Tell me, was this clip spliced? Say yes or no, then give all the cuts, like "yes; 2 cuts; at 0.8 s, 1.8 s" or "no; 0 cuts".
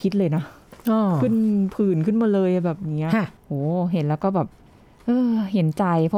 yes; 2 cuts; at 3.4 s, 4.7 s